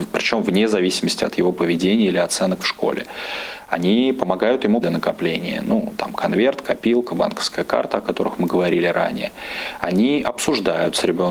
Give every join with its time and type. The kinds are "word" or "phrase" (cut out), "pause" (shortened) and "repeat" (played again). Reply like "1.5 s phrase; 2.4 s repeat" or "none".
4.8 s phrase

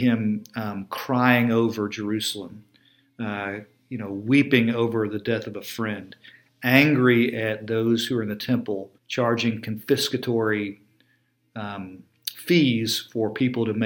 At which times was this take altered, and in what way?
9.0 s pause

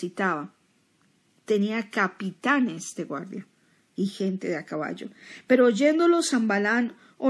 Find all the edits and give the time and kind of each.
none

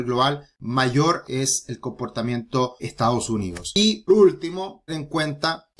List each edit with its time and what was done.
1.2 s phrase; 2.8 s word; 4.1 s word; 4.9 s word

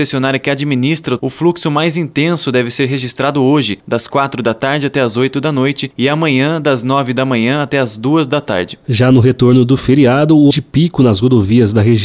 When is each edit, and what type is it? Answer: 1.2 s word; 10.5 s word

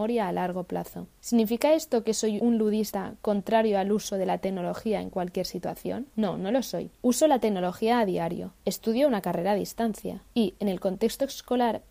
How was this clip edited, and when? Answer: none

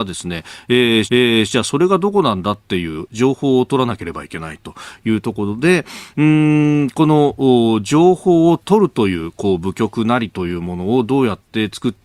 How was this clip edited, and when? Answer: 1.1 s repeat

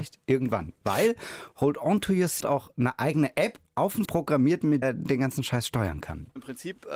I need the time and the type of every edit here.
2.4 s phrase; 4.1 s word; 4.8 s word

